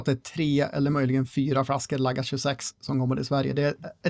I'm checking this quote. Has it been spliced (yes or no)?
no